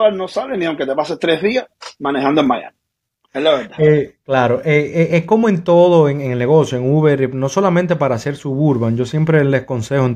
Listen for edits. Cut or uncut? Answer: uncut